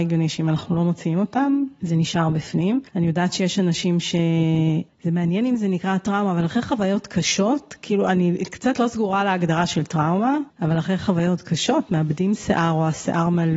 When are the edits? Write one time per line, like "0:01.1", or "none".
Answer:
0:02.9